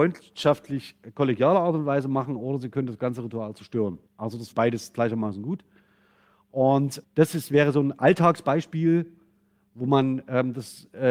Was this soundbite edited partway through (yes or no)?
yes